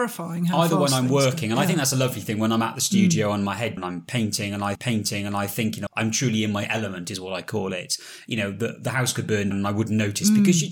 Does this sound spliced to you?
yes; 4 cuts; at 3.8 s, 4.7 s, 5.9 s, 9.5 s

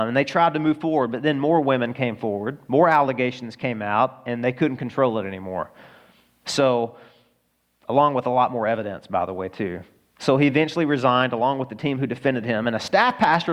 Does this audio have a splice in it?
no; 0 cuts

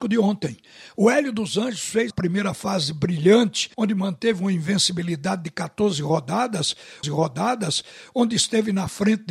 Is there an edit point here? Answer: yes; 3 cuts; at 2.1 s, 3.7 s, 7.0 s

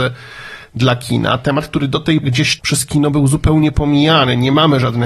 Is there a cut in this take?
yes; 2 cuts; at 2.2 s, 2.6 s

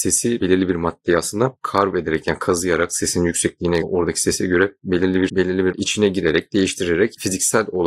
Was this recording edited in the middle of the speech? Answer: yes; 3 cuts; at 3.8 s, 5.3 s, 5.7 s

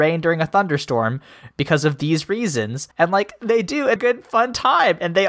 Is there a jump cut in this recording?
yes; 2 cuts; at 2.9 s, 4.0 s

